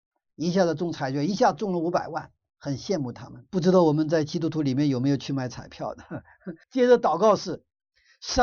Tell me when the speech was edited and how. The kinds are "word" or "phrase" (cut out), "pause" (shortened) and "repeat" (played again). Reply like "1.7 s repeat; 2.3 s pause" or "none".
3.5 s pause; 6.6 s pause

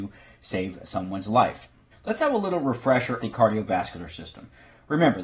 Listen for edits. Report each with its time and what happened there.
1.9 s pause; 3.2 s word

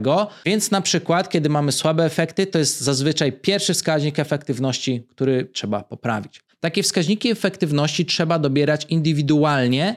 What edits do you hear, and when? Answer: none

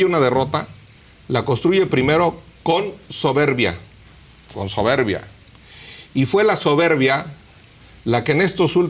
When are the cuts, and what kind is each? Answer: none

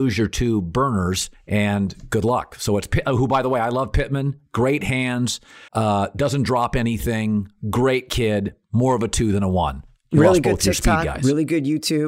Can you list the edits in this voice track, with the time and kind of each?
1.3 s pause; 5.7 s pause

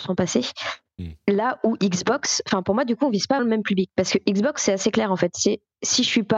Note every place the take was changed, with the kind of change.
3.4 s word

